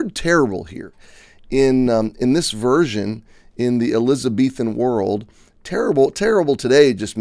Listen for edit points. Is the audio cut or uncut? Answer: uncut